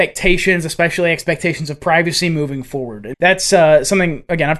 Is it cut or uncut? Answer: cut